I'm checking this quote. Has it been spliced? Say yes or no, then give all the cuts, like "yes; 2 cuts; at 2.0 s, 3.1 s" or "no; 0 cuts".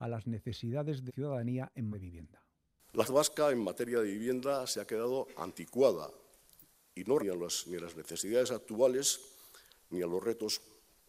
yes; 4 cuts; at 1.1 s, 1.9 s, 3.0 s, 7.2 s